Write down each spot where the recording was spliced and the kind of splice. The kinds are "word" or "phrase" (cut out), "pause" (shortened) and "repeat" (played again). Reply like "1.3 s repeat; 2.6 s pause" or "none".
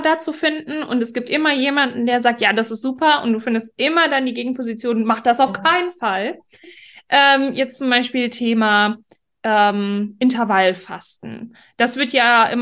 none